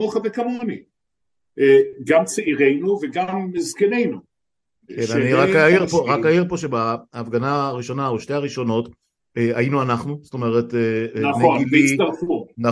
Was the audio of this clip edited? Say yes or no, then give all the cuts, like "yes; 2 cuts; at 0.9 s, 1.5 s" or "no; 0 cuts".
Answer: no; 0 cuts